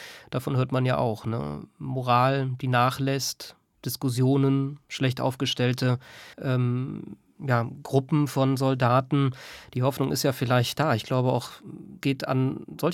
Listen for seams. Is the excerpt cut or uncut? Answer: cut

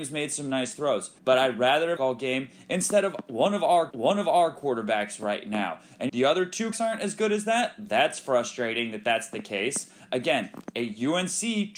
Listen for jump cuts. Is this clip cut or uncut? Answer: cut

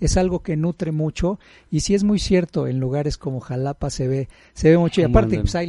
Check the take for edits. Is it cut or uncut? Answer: uncut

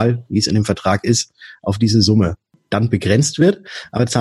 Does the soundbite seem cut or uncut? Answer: uncut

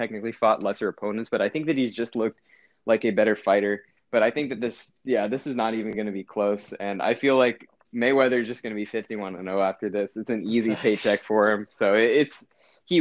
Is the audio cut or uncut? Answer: uncut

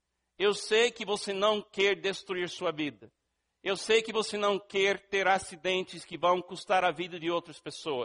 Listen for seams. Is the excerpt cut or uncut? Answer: uncut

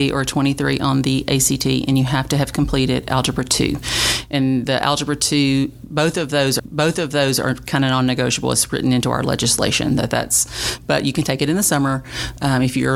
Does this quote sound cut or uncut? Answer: cut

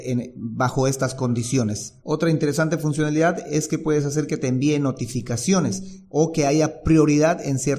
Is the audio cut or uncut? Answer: cut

